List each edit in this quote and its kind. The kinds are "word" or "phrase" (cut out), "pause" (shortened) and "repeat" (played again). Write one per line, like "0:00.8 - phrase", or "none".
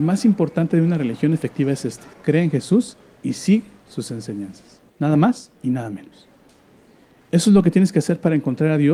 0:02.1 - pause
0:04.9 - pause
0:05.6 - pause